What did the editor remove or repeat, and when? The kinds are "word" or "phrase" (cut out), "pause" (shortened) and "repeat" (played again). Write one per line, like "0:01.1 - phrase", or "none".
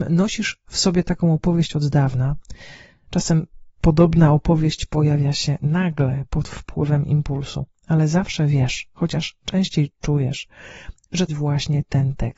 0:03.7 - pause
0:11.3 - phrase